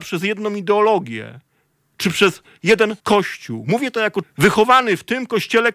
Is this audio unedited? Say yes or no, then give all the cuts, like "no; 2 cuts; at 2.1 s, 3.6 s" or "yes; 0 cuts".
no; 2 cuts; at 3.0 s, 4.2 s